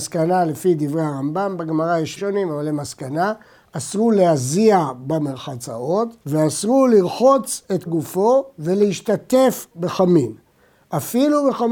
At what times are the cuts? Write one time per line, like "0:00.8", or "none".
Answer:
0:02.2
0:06.2
0:07.9
0:09.7

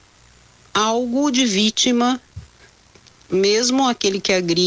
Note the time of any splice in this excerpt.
none

